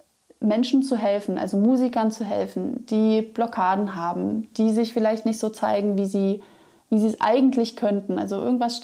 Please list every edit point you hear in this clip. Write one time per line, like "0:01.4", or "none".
none